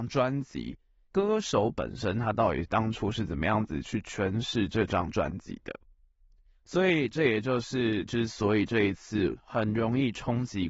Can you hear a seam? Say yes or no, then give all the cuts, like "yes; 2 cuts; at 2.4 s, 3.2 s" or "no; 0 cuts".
yes; 1 cut; at 8.1 s